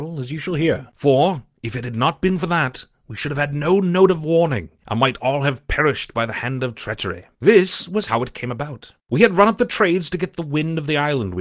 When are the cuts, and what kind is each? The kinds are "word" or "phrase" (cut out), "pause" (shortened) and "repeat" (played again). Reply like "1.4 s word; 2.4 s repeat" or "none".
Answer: 7.3 s pause; 9.0 s pause